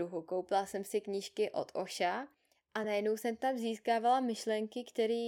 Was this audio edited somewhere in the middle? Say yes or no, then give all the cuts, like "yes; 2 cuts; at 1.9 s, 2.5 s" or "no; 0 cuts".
no; 0 cuts